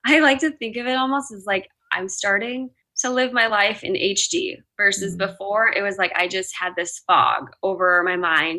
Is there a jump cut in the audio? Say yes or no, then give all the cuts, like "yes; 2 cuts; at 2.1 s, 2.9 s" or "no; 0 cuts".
no; 0 cuts